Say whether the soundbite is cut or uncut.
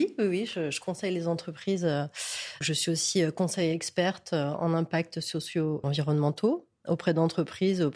cut